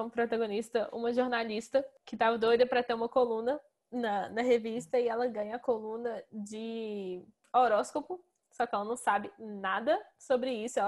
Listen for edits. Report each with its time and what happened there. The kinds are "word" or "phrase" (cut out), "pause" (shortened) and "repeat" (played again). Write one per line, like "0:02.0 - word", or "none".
none